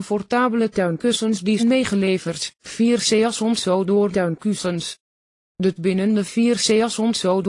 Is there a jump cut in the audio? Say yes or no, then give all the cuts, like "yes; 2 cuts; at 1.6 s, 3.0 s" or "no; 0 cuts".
yes; 4 cuts; at 1.6 s, 2.6 s, 4.1 s, 5.8 s